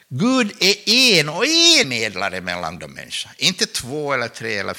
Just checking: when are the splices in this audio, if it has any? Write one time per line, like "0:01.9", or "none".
0:01.8
0:02.8